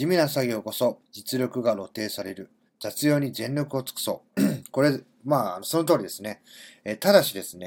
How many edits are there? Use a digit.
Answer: 3